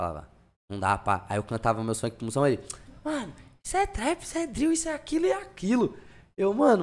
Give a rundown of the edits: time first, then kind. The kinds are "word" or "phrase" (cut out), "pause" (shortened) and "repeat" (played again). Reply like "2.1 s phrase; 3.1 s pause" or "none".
none